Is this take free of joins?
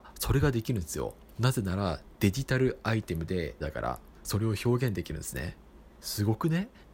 no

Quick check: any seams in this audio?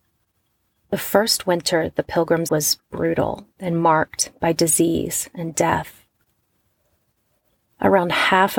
yes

